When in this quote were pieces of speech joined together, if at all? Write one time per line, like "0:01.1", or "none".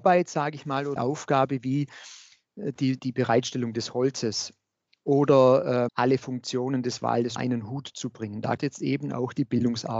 0:01.0
0:03.0
0:05.9
0:07.4
0:08.6